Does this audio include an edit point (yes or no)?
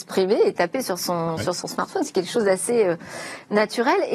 no